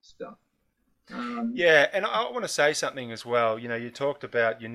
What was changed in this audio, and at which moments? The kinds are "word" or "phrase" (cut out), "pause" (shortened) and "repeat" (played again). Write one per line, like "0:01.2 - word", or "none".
none